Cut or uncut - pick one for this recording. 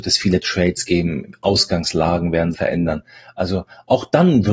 cut